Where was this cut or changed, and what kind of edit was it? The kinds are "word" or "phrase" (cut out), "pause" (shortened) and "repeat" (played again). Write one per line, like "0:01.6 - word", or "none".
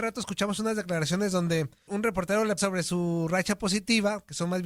0:01.9 - word
0:02.6 - word